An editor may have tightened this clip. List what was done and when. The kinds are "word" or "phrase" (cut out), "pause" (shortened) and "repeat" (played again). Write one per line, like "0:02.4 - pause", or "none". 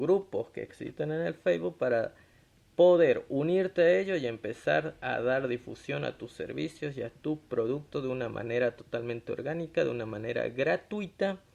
none

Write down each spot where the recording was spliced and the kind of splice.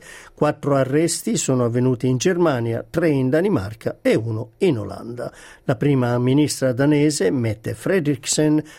none

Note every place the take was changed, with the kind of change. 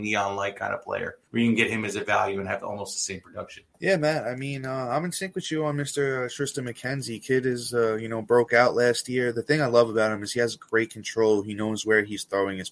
0:01.3 - pause
0:03.7 - pause

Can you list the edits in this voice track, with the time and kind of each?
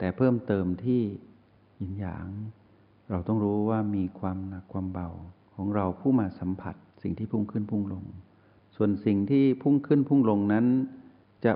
none

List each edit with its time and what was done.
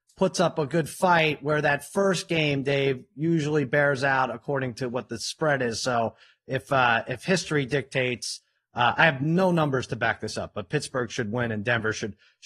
none

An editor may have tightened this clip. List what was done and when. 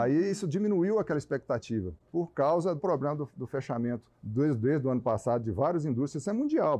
0:02.8 - word
0:04.1 - pause

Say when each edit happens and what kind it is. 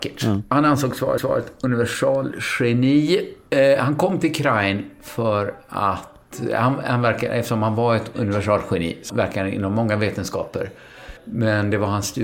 0:01.2 - repeat
0:09.1 - word
0:11.2 - pause

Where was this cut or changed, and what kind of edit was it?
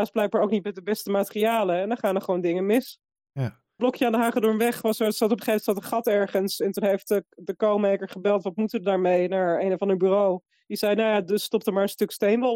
none

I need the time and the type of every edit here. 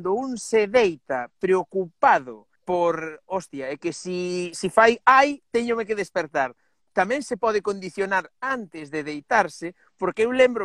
0:02.6 - pause

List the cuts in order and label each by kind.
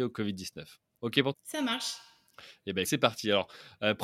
0:01.3 - word
0:02.8 - word

